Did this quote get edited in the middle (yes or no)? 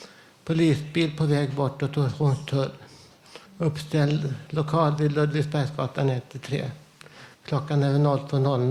yes